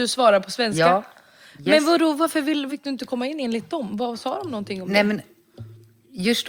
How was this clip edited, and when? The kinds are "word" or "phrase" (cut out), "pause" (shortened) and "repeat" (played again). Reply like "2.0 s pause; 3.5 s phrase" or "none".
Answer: 2.7 s word